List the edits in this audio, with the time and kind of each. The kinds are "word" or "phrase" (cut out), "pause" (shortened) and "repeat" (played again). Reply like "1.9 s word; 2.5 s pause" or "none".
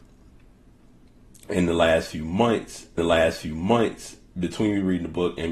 3.0 s repeat